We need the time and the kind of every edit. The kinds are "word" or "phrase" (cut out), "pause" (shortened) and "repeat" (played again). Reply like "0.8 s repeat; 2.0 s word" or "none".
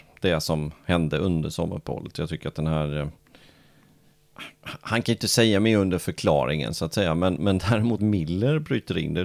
8.0 s word